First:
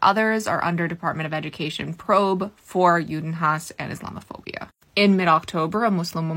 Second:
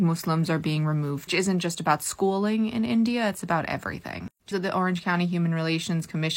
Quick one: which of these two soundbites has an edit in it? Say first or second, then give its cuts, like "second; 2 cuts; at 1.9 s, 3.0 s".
second; 2 cuts; at 1.3 s, 4.5 s